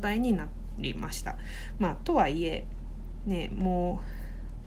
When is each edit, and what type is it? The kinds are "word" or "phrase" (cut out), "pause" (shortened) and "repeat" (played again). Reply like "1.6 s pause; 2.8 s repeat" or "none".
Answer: none